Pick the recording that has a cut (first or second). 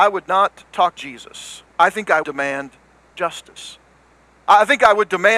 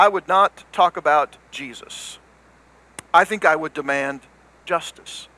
first